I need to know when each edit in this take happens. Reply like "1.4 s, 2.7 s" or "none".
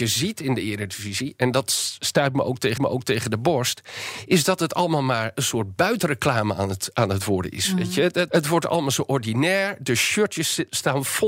2.8 s, 8.3 s